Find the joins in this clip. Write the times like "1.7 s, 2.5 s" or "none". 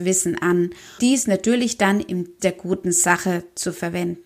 1.0 s, 2.4 s

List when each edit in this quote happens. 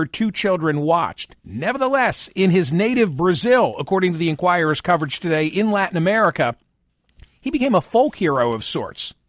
1.4 s

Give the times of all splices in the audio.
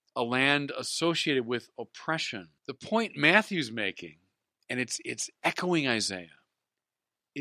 2.6 s

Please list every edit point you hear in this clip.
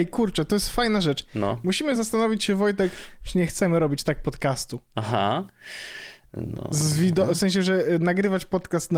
none

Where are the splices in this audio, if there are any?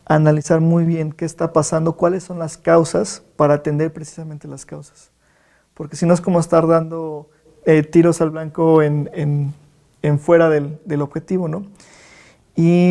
none

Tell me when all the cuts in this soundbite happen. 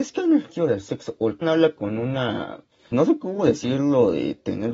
1.4 s, 2.9 s

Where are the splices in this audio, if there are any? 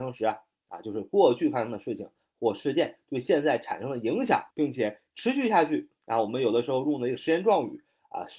4.5 s

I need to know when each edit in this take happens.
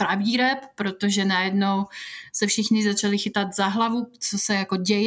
none

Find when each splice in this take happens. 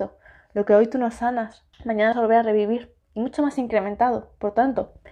1.7 s, 2.1 s, 3.0 s

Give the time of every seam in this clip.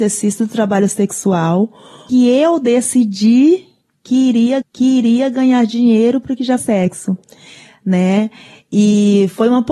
2.1 s, 4.6 s, 6.6 s

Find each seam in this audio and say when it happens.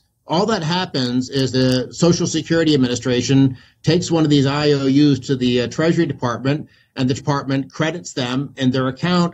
1.5 s, 7.2 s

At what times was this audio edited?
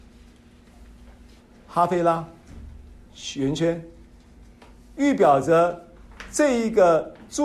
none

